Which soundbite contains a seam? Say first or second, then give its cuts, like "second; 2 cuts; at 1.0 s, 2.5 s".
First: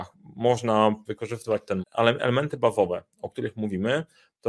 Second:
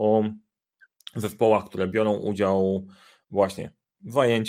first; 2 cuts; at 1.1 s, 1.8 s